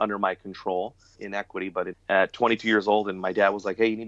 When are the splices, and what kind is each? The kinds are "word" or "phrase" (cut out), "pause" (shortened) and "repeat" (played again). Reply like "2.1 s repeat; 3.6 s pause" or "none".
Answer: 1.2 s word; 1.9 s word